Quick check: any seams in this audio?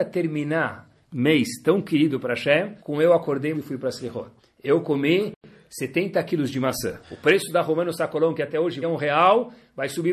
yes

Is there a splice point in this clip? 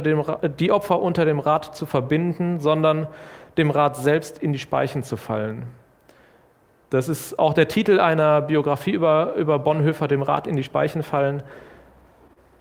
no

